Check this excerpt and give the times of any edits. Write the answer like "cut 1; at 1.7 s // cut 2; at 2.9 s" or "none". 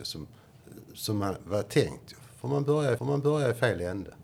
cut 1; at 0.9 s // cut 2; at 3.0 s